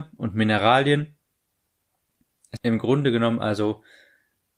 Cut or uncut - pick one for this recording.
cut